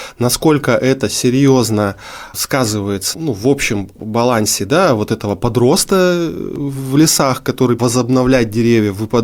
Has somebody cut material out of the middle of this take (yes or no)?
yes